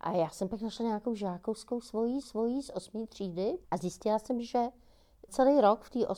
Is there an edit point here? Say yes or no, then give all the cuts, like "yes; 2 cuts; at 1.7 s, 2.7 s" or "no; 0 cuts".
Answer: yes; 3 cuts; at 2.2 s, 3.6 s, 5.3 s